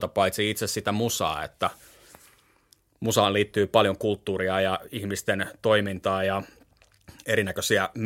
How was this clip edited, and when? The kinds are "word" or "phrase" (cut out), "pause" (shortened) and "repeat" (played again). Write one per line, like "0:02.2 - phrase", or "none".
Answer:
none